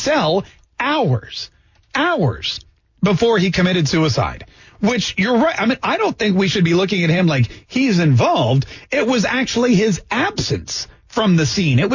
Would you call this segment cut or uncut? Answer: uncut